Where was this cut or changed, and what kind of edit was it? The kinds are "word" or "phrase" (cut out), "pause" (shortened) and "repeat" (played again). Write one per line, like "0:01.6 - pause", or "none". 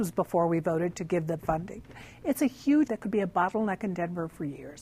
0:01.4 - word
0:02.9 - word